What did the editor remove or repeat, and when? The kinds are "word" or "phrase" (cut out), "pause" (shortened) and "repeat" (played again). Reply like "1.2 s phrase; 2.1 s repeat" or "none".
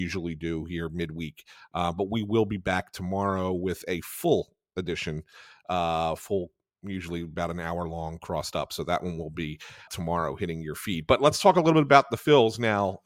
9.9 s word